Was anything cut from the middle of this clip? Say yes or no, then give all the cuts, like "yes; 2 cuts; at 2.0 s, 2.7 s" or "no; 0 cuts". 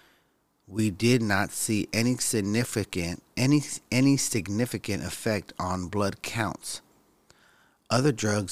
no; 0 cuts